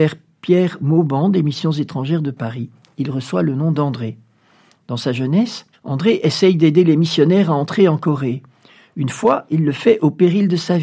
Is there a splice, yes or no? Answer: yes